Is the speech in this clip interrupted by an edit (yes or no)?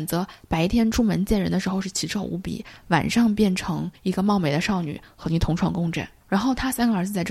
yes